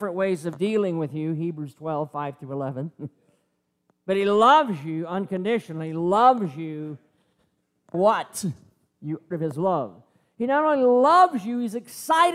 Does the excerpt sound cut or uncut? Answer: cut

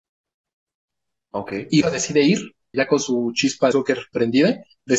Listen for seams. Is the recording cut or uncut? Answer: cut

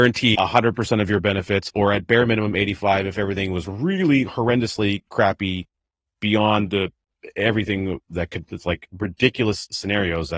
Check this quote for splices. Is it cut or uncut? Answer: uncut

